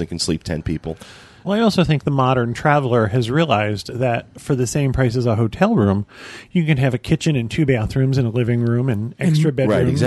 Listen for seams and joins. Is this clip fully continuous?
yes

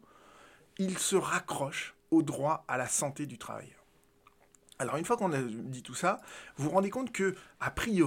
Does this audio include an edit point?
no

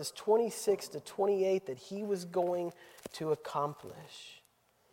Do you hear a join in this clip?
no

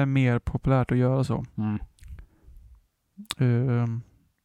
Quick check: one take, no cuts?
yes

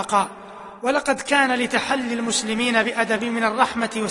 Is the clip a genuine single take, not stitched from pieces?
no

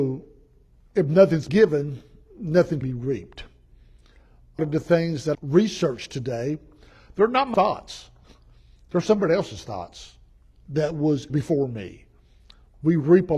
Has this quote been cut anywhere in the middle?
yes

